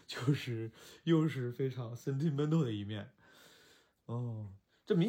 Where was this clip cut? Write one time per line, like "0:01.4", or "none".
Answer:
none